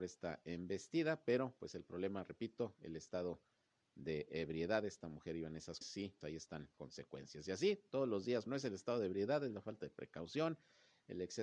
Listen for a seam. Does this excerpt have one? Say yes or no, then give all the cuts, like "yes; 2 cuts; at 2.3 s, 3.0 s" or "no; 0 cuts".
yes; 4 cuts; at 5.8 s, 6.2 s, 6.7 s, 8.5 s